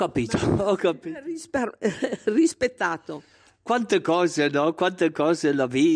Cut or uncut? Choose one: uncut